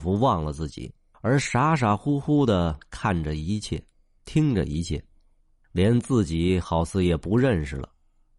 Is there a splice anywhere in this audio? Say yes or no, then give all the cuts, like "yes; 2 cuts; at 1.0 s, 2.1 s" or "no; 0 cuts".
no; 0 cuts